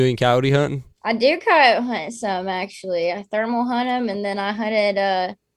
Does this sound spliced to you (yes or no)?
yes